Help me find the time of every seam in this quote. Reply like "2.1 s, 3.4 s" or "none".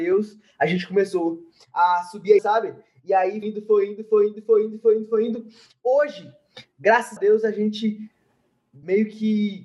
2.4 s, 3.4 s, 7.2 s